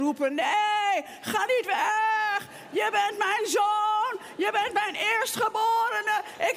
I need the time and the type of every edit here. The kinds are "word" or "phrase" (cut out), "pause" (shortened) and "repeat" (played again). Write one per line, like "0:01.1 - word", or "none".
none